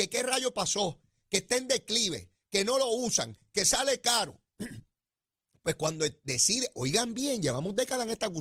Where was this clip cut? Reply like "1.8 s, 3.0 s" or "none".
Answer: none